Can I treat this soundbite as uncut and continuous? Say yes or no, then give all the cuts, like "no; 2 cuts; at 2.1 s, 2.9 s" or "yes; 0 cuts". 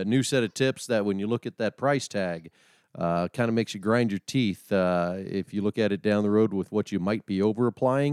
yes; 0 cuts